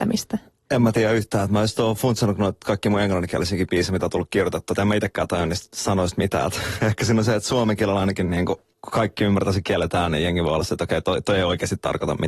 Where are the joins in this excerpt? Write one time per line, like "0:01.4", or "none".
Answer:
0:08.7